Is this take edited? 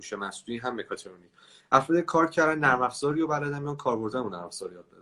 no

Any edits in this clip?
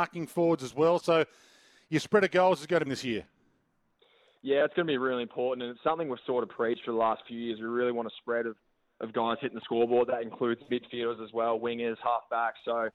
yes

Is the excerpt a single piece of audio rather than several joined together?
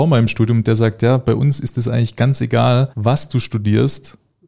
no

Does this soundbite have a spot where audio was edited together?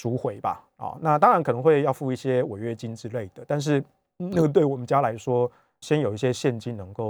yes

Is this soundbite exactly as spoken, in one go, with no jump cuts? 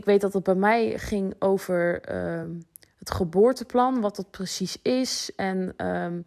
yes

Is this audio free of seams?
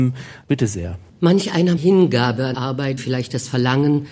no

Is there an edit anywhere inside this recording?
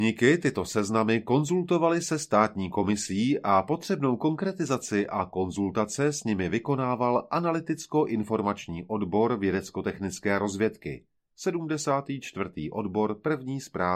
no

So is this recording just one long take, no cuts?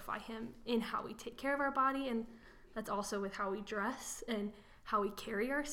yes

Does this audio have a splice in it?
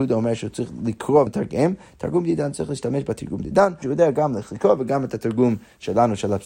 yes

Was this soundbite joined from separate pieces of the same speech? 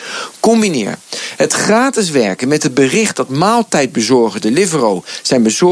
no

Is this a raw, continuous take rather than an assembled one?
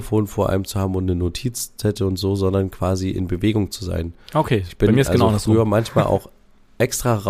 yes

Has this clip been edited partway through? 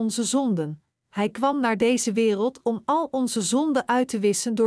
no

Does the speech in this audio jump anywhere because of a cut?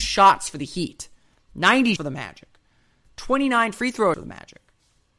yes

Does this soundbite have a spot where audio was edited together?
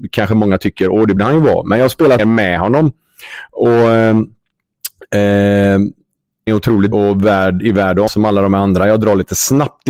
yes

